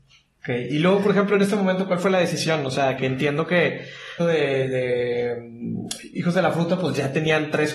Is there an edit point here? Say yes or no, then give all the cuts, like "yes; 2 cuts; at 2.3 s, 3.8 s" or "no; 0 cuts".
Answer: yes; 2 cuts; at 3.0 s, 4.2 s